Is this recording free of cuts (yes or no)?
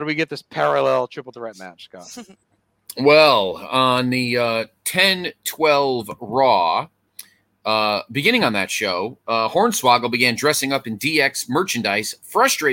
yes